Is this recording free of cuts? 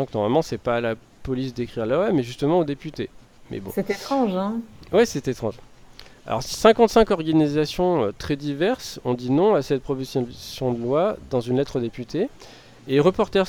yes; 0 cuts

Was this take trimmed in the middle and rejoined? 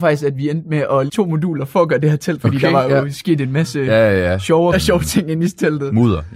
yes; 3 cuts; at 1.1 s, 2.4 s, 4.7 s

